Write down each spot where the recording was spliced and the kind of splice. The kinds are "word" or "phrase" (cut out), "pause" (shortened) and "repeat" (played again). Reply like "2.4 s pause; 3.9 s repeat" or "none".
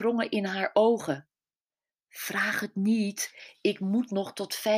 none

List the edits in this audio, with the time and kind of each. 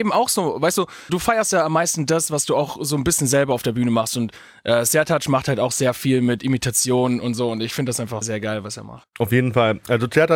1.1 s word; 8.2 s word

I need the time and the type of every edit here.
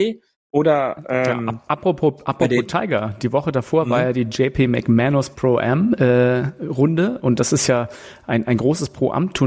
none

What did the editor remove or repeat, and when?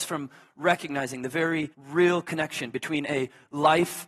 1.7 s pause

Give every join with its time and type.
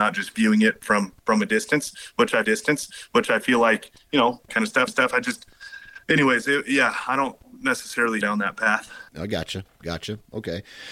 2.4 s repeat; 4.5 s phrase; 4.9 s repeat; 6.0 s pause; 8.2 s phrase; 9.1 s pause

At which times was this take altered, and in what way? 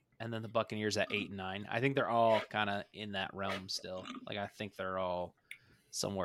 none

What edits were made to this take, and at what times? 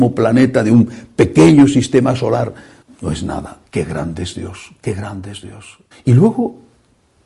2.8 s pause; 3.7 s pause; 5.9 s pause

